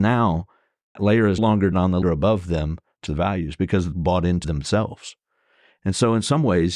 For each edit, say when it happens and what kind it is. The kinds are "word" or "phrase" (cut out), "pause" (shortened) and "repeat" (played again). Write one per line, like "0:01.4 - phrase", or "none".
0:01.0 - word
0:01.4 - word
0:01.7 - word
0:02.0 - word
0:03.1 - word
0:03.9 - word
0:04.4 - word